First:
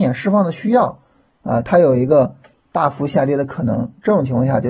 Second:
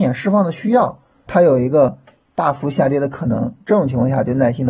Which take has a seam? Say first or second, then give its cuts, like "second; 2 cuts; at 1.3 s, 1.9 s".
second; 1 cut; at 1.3 s